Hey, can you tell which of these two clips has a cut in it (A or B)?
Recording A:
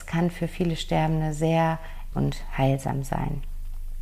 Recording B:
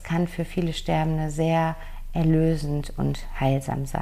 A